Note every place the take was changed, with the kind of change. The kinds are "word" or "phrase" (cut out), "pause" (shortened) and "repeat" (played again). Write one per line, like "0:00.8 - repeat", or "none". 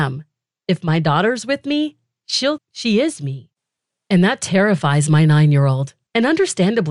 0:02.6 - word